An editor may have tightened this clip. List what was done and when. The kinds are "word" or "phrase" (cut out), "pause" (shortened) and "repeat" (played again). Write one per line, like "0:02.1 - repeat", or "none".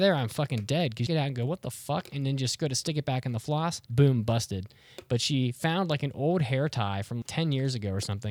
0:01.1 - phrase
0:03.8 - pause
0:07.2 - word